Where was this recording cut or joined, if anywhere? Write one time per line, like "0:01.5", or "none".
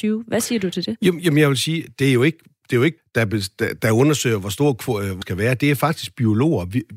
0:03.0
0:03.8
0:05.2